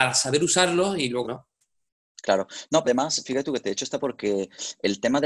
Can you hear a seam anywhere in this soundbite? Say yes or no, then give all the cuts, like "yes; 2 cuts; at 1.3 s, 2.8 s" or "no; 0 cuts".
yes; 3 cuts; at 1.2 s, 2.8 s, 4.0 s